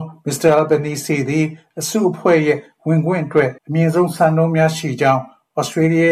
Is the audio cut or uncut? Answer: cut